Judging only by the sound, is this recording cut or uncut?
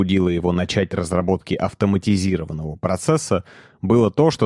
uncut